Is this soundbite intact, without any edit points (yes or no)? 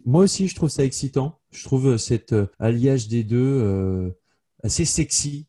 no